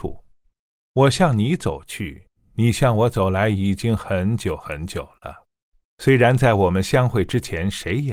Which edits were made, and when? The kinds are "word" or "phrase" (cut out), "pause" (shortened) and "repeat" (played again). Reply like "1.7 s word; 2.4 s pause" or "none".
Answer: 5.8 s pause